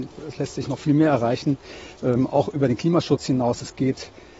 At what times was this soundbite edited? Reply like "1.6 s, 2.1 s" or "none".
none